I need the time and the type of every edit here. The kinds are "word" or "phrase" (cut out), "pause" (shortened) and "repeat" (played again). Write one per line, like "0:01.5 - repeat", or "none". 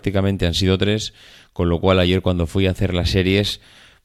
none